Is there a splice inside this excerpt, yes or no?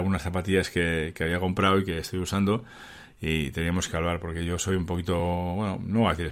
no